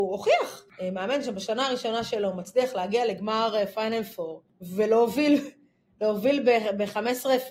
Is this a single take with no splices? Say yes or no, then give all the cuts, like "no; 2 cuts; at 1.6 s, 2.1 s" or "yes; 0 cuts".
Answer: yes; 0 cuts